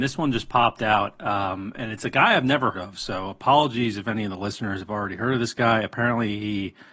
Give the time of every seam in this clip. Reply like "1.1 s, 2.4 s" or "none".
2.7 s